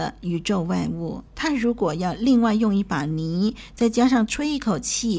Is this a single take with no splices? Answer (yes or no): no